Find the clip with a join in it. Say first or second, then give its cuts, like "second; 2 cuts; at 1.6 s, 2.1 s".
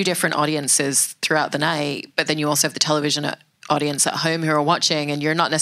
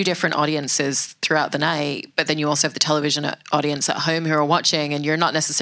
second; 1 cut; at 3.4 s